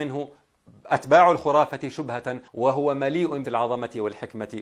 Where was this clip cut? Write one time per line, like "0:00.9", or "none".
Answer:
0:02.5
0:03.4